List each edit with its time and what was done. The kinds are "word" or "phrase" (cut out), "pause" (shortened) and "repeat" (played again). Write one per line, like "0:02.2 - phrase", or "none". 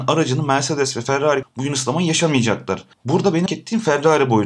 0:01.4 - phrase
0:02.9 - pause
0:03.5 - word